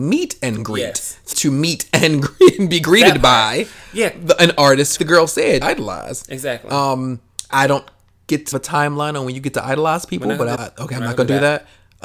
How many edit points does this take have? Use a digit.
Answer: 6